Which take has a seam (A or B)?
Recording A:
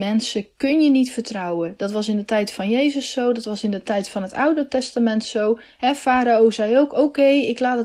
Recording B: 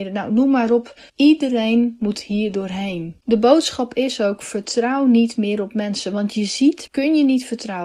B